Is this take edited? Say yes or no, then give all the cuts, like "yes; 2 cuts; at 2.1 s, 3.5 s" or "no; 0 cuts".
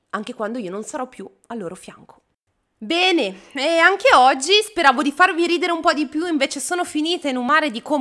no; 0 cuts